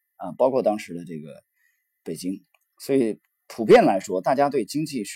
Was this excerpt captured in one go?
yes; 0 cuts

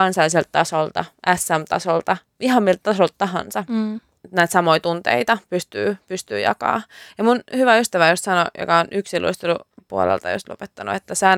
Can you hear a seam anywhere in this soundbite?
no; 0 cuts

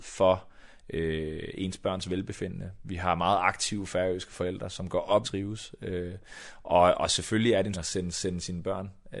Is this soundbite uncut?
no; 3 cuts; at 5.2 s, 7.7 s, 8.1 s

